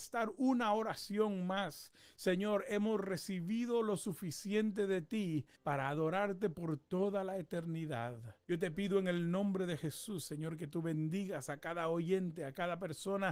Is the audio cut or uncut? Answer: cut